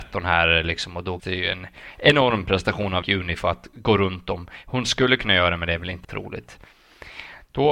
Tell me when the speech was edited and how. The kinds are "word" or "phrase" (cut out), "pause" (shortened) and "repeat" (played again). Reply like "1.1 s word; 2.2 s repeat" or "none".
1.2 s word; 3.0 s word; 6.0 s word